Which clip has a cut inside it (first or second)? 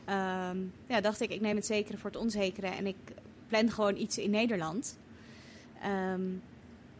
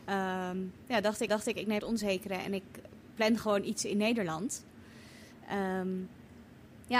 second